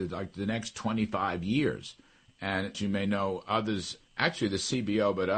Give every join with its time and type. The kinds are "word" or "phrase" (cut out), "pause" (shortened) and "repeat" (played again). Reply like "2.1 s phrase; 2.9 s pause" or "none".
2.7 s word; 4.0 s word